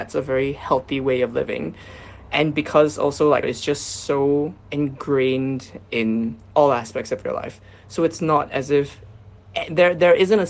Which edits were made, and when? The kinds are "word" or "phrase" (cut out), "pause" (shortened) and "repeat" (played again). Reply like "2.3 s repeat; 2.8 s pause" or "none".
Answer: 3.4 s word; 4.6 s pause